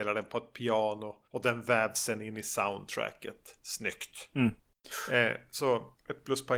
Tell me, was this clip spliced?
yes; 1 cut; at 1.2 s

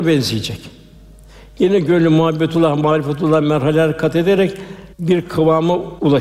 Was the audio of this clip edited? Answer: yes; 1 cut; at 4.9 s

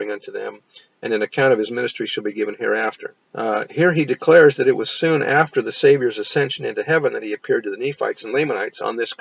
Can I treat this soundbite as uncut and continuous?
no; 1 cut; at 3.2 s

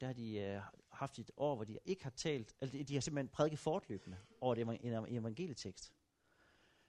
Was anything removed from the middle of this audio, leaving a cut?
no; 0 cuts

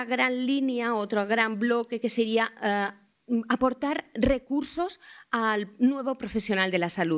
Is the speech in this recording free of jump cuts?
yes; 0 cuts

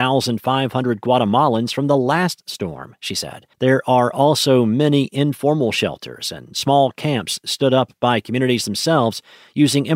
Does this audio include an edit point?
yes; 1 cut; at 3.5 s

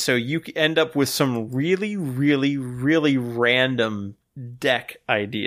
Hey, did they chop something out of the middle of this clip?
no; 0 cuts

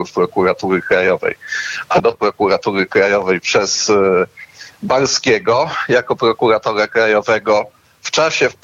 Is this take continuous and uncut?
no; 1 cut; at 2.0 s

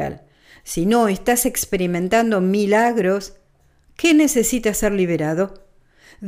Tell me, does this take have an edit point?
no; 0 cuts

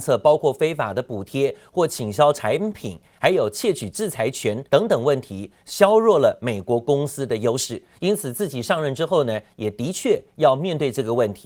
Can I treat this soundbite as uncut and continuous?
no; 1 cut; at 4.7 s

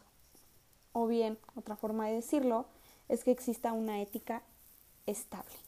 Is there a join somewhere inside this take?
no; 0 cuts

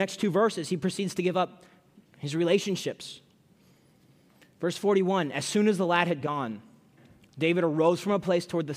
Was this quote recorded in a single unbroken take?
yes; 0 cuts

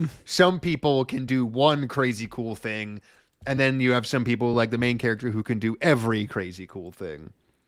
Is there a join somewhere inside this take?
no; 0 cuts

